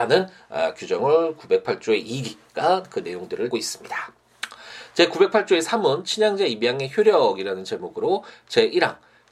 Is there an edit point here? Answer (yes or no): yes